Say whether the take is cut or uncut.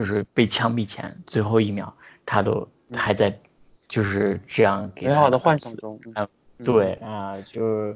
uncut